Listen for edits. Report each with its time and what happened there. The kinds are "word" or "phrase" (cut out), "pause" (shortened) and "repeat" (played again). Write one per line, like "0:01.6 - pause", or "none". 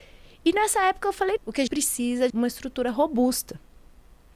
0:01.4 - word
0:01.7 - word
0:02.3 - phrase

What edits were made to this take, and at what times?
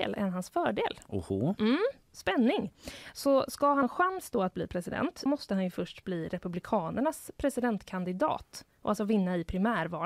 0:03.8 - word
0:05.3 - word

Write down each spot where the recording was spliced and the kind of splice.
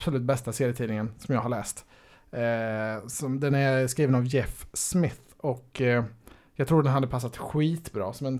none

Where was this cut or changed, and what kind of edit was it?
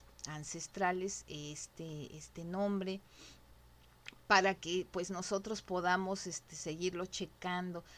none

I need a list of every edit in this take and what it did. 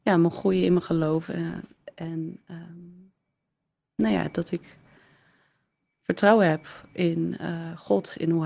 none

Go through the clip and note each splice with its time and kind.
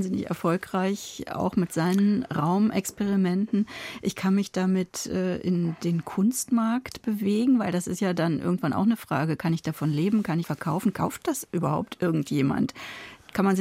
0:10.4 - phrase

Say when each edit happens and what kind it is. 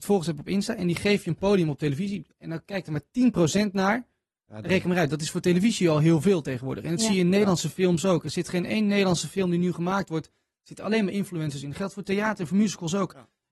none

